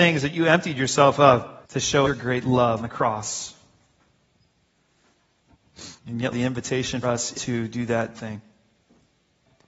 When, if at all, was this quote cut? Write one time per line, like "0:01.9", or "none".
0:01.6
0:02.0
0:02.8
0:06.0
0:06.3
0:07.0
0:07.3
0:08.1

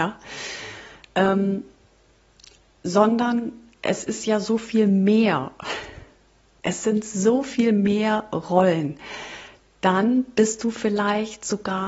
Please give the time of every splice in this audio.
none

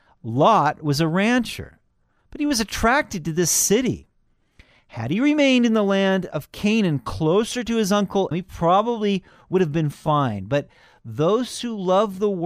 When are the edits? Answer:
0:08.3

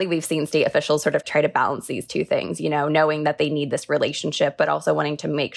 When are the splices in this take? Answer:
none

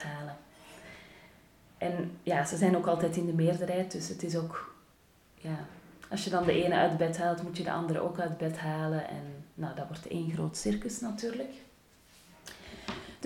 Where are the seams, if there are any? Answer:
none

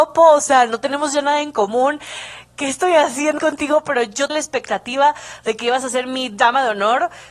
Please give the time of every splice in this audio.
0:03.4
0:04.3

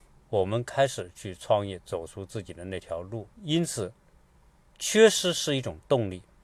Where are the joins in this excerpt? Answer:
0:03.3

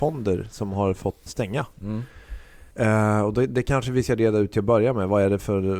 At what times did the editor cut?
0:01.3
0:02.7

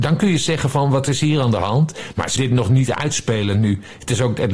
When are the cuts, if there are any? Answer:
0:02.4

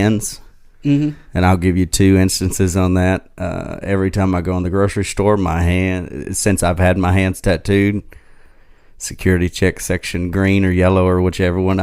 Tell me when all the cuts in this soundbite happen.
none

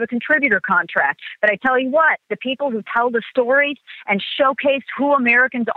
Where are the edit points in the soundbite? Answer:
0:02.2

